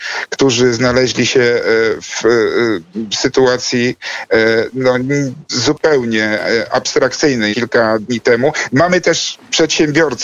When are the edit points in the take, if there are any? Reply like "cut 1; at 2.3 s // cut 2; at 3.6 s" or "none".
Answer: cut 1; at 5.4 s // cut 2; at 7.5 s